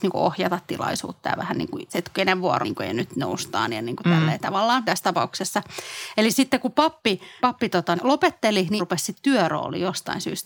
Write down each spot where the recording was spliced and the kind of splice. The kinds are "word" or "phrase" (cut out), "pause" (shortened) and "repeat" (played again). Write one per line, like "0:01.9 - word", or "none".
0:01.9 - word
0:02.6 - word
0:04.8 - word
0:07.4 - word
0:08.0 - word
0:08.8 - word